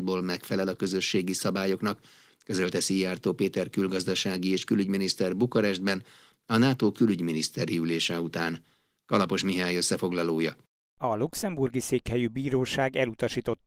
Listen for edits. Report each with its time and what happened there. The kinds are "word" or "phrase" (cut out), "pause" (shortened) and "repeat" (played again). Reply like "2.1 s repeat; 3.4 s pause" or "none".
none